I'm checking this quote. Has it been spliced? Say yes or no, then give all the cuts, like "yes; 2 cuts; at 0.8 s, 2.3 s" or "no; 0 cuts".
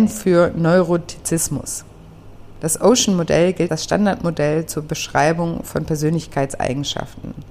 yes; 1 cut; at 3.7 s